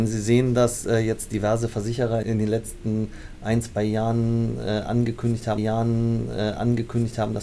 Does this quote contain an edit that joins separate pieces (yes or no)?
yes